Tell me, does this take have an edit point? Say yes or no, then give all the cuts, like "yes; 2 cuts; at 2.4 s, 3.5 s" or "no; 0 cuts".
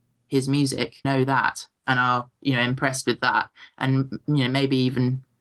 yes; 1 cut; at 1.0 s